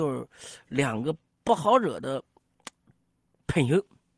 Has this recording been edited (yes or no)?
no